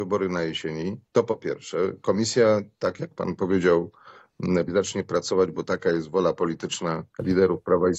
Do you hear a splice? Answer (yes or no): yes